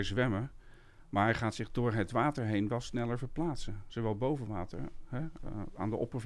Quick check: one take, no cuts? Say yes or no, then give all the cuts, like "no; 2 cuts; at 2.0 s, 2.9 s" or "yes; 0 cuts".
yes; 0 cuts